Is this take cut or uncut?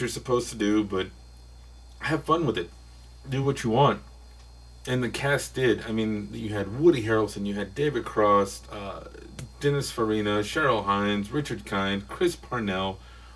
uncut